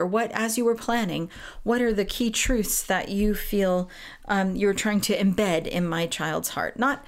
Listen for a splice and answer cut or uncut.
uncut